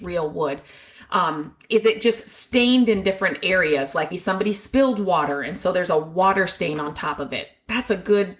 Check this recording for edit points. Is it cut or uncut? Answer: cut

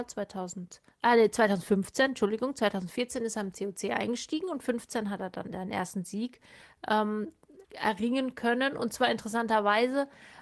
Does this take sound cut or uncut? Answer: cut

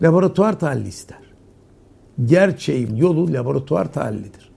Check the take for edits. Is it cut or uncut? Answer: cut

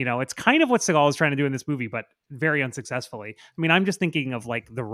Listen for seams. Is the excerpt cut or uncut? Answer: uncut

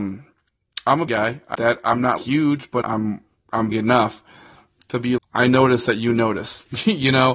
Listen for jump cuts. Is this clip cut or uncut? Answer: cut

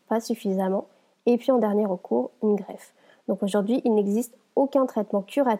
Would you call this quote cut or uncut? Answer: uncut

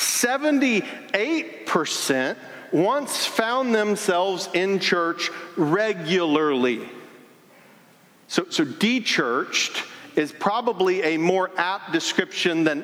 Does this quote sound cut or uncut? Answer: uncut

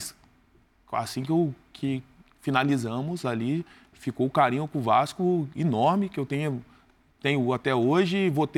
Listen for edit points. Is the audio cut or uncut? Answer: uncut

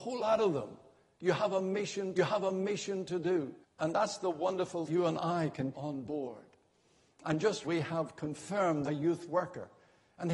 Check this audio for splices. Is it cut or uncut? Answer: cut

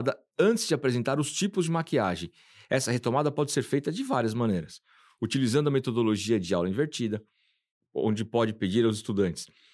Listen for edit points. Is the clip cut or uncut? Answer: uncut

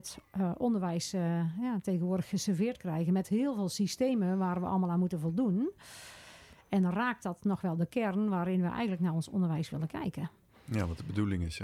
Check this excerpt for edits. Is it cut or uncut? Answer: uncut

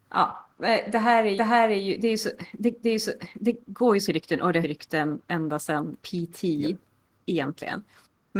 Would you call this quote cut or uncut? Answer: cut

